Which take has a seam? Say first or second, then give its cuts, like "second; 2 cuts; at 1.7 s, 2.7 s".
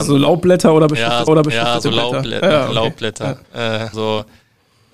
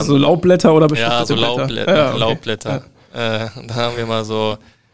first; 3 cuts; at 1.3 s, 3.4 s, 3.9 s